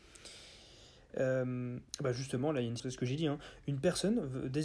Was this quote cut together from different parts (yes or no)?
yes